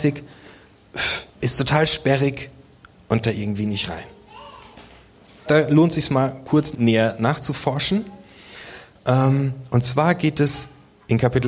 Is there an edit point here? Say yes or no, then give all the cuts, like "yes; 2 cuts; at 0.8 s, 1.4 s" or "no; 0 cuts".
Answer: yes; 4 cuts; at 1.3 s, 3.2 s, 5.5 s, 6.7 s